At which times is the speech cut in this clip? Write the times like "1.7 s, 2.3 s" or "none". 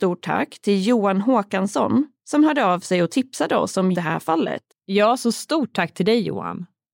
3.9 s, 4.7 s